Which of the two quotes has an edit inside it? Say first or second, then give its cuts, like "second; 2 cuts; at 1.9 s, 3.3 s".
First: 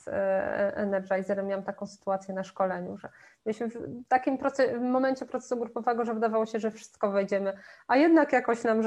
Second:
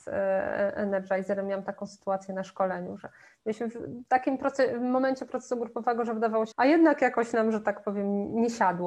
second; 1 cut; at 6.5 s